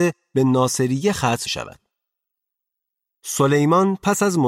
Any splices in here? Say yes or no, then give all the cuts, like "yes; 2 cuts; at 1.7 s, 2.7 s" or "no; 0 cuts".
yes; 1 cut; at 1.5 s